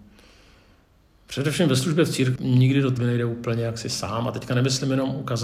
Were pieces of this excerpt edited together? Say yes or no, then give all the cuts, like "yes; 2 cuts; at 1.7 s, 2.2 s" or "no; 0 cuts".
yes; 2 cuts; at 2.4 s, 3.0 s